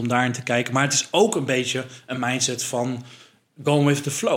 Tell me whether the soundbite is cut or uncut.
uncut